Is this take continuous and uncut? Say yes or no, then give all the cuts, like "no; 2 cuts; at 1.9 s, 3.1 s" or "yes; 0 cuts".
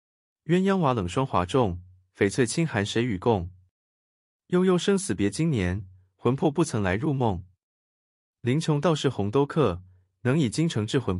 yes; 0 cuts